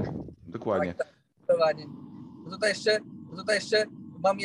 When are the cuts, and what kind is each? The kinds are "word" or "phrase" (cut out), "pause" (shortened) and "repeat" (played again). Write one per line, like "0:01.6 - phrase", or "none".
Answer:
0:03.3 - repeat